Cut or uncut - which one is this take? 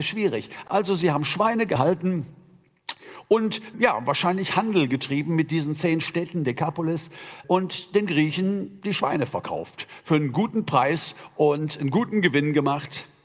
cut